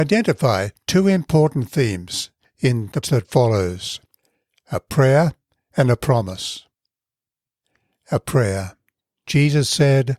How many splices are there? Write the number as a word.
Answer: one